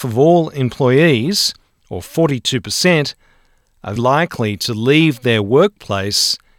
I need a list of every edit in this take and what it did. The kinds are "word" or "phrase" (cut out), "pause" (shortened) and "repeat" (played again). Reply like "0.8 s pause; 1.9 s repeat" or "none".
4.0 s word

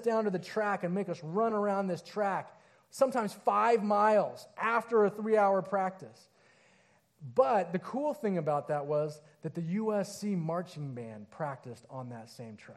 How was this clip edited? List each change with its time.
none

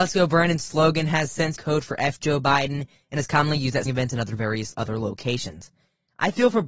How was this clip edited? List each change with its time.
1.6 s word; 3.9 s word; 4.7 s word

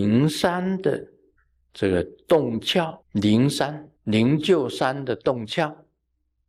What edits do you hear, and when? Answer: 1.4 s pause; 3.0 s pause; 4.0 s pause

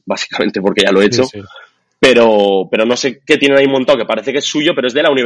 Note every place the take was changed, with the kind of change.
none

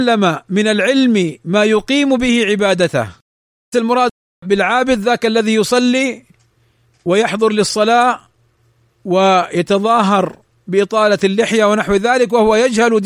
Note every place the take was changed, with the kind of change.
3.7 s word

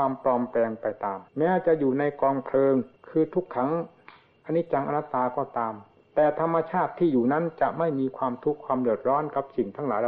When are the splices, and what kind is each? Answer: 1.3 s pause; 3.0 s pause

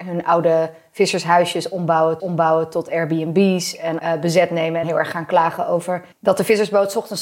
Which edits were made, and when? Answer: 2.2 s repeat; 4.0 s phrase; 4.8 s phrase; 6.1 s pause

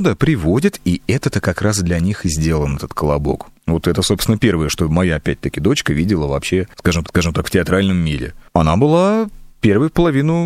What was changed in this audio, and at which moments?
3.6 s pause; 7.0 s repeat; 9.5 s pause

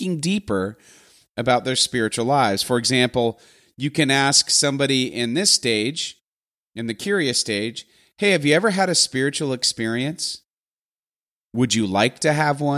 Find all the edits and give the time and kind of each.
none

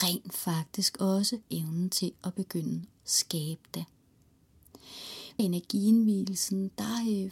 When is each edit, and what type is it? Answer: 1.4 s word; 2.9 s word; 5.4 s word

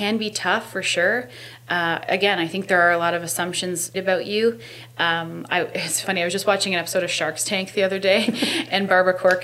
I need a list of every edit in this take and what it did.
3.9 s word; 6.0 s word

